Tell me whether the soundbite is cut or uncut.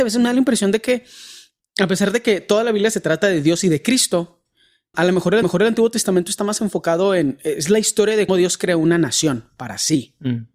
cut